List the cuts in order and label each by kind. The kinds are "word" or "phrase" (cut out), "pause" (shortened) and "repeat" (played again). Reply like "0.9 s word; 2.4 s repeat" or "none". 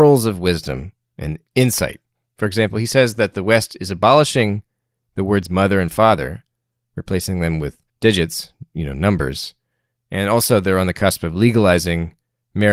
1.5 s pause; 7.9 s pause